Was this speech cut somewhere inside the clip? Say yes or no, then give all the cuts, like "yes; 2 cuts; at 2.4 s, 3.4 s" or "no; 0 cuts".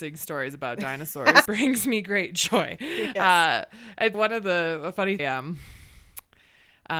yes; 3 cuts; at 1.5 s, 4.1 s, 5.2 s